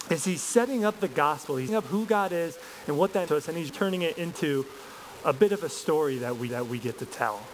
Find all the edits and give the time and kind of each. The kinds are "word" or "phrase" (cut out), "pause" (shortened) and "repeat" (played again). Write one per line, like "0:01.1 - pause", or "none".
0:01.7 - word
0:03.3 - word
0:03.7 - word
0:06.5 - repeat